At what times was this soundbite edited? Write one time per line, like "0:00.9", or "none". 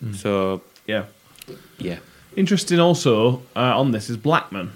none